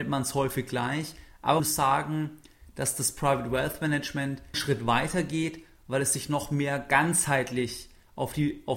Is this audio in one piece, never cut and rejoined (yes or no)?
no